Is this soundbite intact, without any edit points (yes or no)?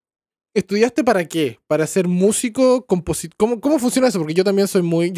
no